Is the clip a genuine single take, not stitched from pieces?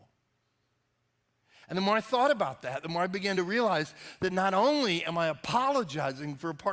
yes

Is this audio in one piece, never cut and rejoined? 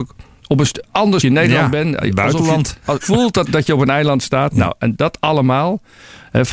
no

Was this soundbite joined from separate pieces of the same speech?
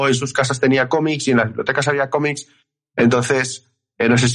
no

